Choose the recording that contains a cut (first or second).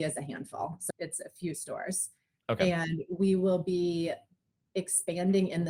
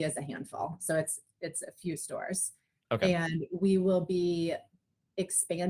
first